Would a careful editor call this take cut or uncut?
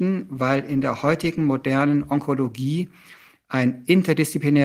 uncut